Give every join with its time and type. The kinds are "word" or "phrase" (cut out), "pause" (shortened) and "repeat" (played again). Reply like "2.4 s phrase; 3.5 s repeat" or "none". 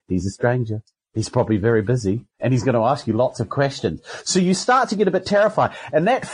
1.0 s pause; 2.3 s pause